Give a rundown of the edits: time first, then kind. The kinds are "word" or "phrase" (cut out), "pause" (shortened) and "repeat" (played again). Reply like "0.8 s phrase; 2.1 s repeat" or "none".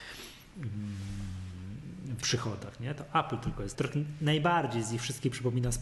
2.2 s word; 3.7 s word